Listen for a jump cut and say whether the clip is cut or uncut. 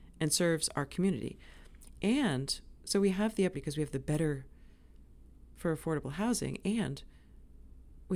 cut